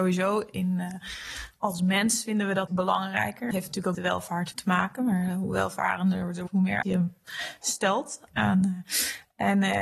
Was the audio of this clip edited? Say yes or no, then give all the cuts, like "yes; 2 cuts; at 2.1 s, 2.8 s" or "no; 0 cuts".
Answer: yes; 6 cuts; at 2.7 s, 3.5 s, 3.9 s, 4.5 s, 6.5 s, 6.8 s